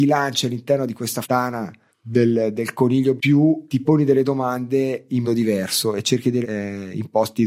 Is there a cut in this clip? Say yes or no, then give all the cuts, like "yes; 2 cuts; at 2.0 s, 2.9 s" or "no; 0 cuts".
yes; 6 cuts; at 1.2 s, 1.9 s, 3.2 s, 3.7 s, 5.2 s, 6.4 s